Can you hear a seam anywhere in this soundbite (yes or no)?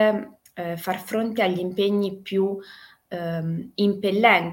no